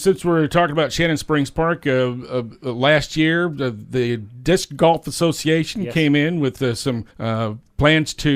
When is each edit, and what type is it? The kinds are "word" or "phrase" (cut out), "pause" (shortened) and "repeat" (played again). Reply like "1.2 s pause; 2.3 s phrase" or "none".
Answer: 7.1 s pause